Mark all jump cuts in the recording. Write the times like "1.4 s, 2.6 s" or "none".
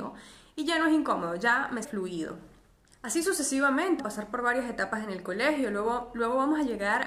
1.8 s, 2.9 s, 4.0 s